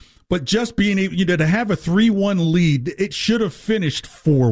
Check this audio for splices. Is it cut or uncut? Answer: uncut